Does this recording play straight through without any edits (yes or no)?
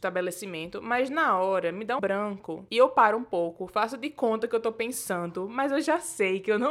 no